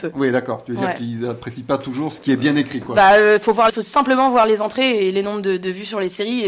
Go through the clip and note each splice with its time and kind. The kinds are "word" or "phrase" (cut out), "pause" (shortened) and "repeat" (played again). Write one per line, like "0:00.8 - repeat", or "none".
0:03.7 - word